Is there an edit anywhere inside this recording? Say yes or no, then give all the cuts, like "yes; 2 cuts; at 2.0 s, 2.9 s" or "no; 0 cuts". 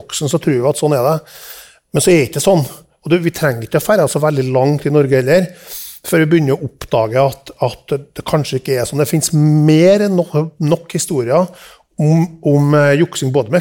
no; 0 cuts